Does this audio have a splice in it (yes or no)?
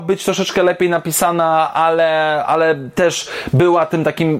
no